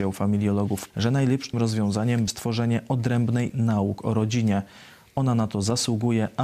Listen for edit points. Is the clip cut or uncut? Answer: cut